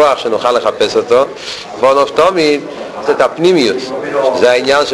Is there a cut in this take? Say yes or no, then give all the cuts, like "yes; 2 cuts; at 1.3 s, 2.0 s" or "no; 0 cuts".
yes; 2 cuts; at 1.8 s, 3.1 s